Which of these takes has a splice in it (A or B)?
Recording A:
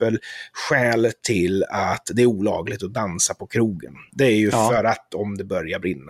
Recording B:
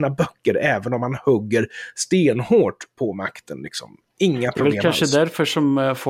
A